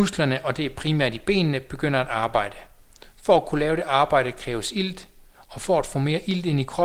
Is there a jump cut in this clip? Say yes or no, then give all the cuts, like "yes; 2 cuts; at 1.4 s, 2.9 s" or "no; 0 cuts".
no; 0 cuts